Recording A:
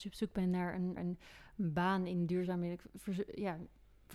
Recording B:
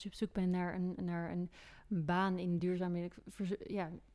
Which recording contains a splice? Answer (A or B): A